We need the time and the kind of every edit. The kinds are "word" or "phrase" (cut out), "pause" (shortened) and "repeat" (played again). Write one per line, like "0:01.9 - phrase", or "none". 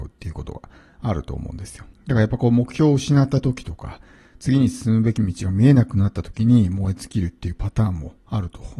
0:01.9 - pause